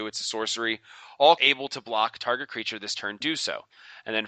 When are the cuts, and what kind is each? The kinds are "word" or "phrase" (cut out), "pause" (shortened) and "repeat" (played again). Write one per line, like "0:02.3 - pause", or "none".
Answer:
0:01.4 - word